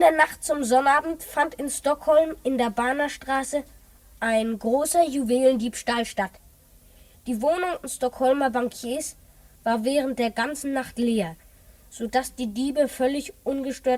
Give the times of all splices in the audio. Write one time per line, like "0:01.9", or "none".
0:07.8